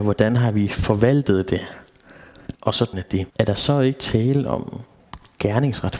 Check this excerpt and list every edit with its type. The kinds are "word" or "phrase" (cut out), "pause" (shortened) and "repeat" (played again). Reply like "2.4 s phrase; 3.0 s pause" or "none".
2.5 s pause; 2.9 s phrase; 3.3 s pause